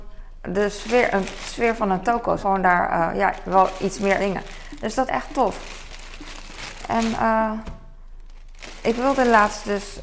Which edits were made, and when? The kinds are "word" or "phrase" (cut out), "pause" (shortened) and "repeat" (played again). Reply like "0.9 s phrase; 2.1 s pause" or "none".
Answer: 2.4 s word; 4.2 s word; 5.1 s word